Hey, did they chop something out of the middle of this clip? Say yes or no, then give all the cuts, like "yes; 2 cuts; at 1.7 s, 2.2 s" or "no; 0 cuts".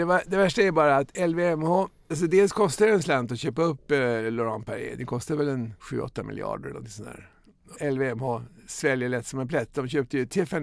yes; 3 cuts; at 2.1 s, 5.8 s, 7.7 s